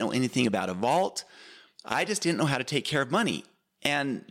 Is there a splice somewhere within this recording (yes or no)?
no